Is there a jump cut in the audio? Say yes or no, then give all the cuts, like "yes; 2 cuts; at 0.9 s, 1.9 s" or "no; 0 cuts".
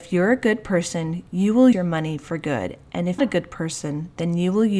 yes; 2 cuts; at 1.7 s, 3.2 s